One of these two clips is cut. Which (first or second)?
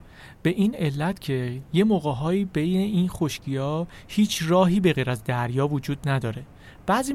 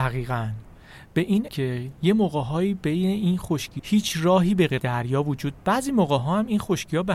second